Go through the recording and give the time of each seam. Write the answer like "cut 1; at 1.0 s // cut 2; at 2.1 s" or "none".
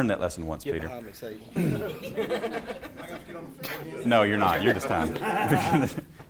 cut 1; at 1.5 s // cut 2; at 4.0 s // cut 3; at 4.7 s